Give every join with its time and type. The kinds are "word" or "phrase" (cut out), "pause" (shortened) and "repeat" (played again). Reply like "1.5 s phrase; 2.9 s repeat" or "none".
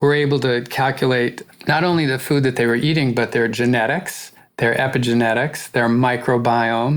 none